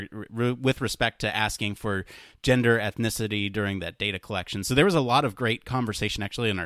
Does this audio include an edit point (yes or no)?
no